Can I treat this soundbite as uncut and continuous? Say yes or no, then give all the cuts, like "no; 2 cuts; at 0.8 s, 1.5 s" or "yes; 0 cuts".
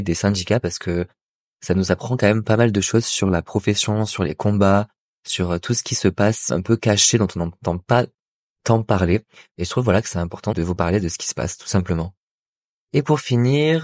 no; 1 cut; at 10.5 s